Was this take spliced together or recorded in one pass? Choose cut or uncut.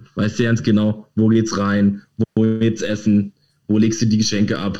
uncut